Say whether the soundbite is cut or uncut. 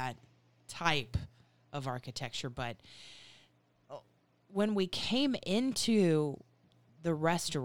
uncut